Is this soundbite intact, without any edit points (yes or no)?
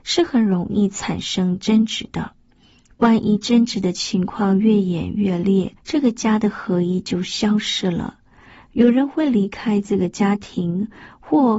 no